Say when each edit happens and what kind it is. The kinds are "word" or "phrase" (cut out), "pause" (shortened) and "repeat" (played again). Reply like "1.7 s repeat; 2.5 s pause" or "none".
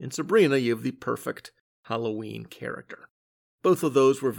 none